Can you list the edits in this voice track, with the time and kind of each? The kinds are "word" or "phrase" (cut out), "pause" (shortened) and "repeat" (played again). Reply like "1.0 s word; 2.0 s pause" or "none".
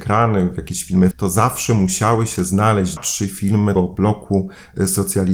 1.1 s word; 3.0 s word; 3.8 s word